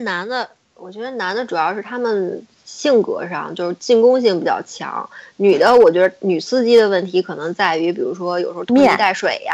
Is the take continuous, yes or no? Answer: no